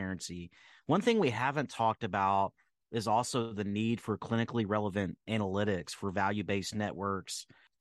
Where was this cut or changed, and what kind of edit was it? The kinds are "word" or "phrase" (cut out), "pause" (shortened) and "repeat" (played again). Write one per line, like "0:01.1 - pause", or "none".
none